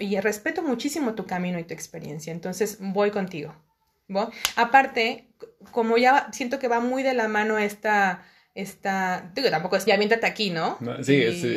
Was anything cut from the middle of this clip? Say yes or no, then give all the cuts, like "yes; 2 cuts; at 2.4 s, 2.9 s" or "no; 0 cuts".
yes; 1 cut; at 9.9 s